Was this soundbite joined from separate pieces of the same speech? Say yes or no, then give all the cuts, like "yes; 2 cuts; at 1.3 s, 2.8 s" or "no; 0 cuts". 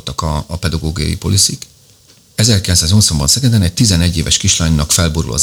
no; 0 cuts